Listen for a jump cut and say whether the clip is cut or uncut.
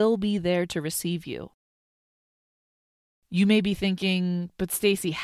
uncut